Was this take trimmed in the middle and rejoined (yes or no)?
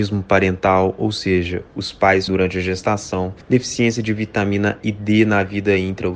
yes